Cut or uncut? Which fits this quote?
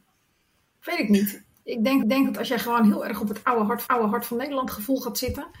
cut